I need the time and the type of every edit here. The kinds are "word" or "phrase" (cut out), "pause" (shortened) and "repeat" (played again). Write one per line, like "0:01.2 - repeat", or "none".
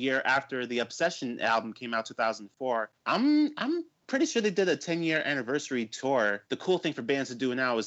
0:03.0 - pause
0:06.5 - pause